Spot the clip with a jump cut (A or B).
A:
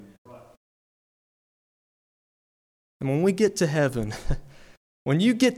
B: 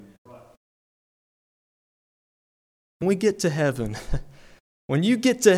B